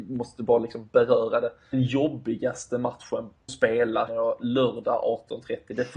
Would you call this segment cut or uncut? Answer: cut